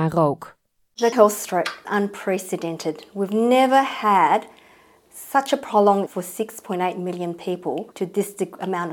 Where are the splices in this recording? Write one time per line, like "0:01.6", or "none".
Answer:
0:01.1
0:01.8
0:06.1
0:07.9

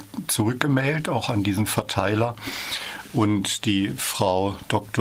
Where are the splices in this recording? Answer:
none

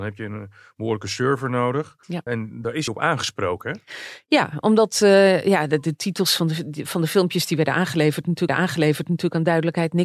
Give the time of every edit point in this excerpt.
0:02.0
0:02.9
0:08.5

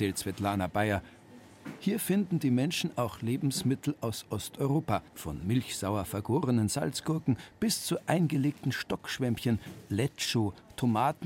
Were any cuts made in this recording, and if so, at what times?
0:05.1

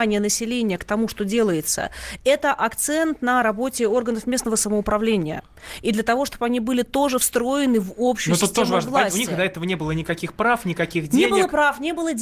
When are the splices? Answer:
none

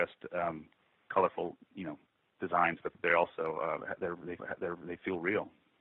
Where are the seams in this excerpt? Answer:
0:04.4

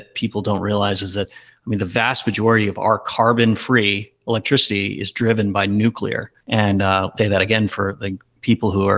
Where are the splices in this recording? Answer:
0:06.4
0:07.2

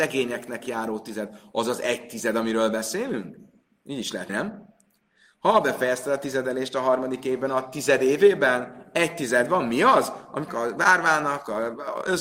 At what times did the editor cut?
0:04.3
0:10.5

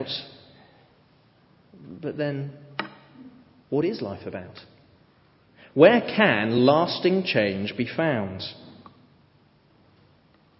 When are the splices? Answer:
none

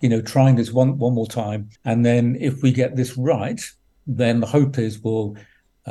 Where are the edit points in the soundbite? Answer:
0:01.8
0:03.9

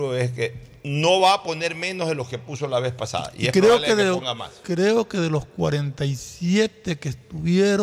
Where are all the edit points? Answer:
none

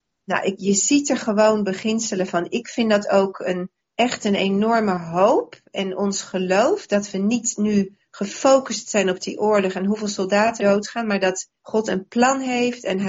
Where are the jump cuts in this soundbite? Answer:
0:03.8
0:10.6
0:11.6

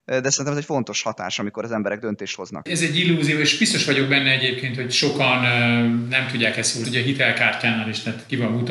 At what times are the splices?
0:06.8

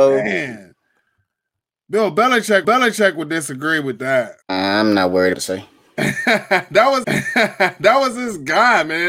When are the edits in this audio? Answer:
0:02.6
0:04.4
0:05.3
0:07.0

